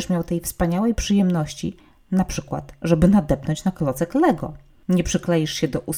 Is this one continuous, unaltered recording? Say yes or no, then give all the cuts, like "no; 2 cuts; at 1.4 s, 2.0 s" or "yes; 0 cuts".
yes; 0 cuts